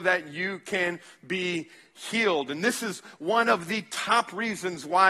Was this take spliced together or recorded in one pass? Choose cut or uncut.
uncut